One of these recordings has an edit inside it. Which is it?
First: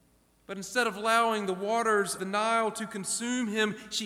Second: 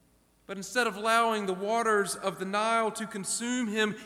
first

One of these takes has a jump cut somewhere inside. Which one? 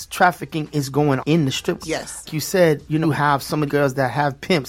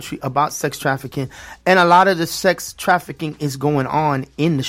first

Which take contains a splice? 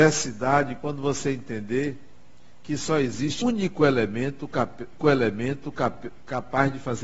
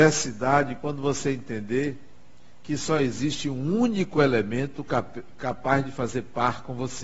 first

